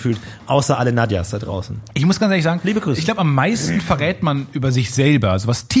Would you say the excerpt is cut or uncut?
uncut